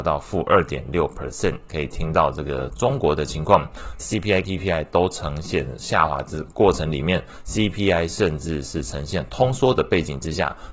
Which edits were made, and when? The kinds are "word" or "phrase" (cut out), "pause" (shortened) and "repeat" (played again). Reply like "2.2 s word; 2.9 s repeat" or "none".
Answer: 4.0 s word; 4.4 s word